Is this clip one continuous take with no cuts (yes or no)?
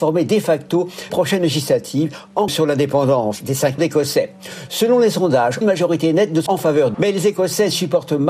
no